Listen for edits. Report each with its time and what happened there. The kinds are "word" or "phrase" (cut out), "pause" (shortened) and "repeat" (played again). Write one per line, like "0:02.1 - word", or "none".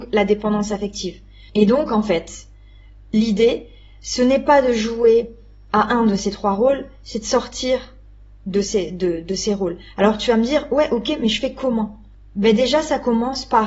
none